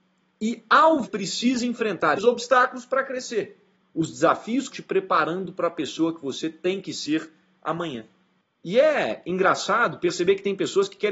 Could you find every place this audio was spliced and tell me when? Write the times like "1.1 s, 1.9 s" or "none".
1.0 s, 2.2 s, 4.7 s